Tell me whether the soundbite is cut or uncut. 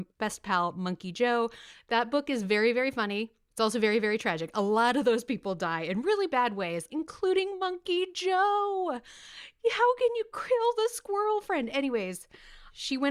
uncut